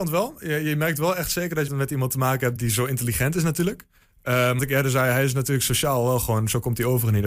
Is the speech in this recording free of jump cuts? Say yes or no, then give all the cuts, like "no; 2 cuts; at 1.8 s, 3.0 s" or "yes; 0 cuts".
no; 3 cuts; at 1.7 s, 2.6 s, 4.6 s